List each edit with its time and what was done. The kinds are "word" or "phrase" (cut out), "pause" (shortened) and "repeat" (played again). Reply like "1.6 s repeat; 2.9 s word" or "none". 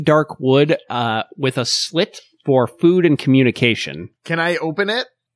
4.2 s pause